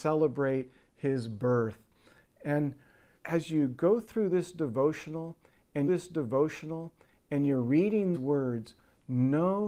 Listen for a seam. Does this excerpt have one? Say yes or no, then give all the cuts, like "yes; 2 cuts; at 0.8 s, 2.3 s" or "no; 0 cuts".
yes; 3 cuts; at 3.2 s, 5.9 s, 8.1 s